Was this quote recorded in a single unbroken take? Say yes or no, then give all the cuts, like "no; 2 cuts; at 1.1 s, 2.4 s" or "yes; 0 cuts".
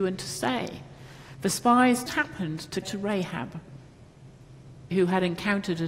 no; 3 cuts; at 2.1 s, 2.8 s, 4.9 s